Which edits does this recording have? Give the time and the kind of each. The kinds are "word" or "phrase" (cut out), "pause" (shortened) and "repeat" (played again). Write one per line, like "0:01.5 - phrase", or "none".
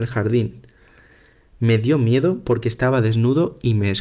none